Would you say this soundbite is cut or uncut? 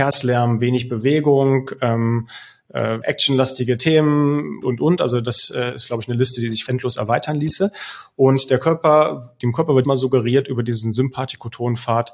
cut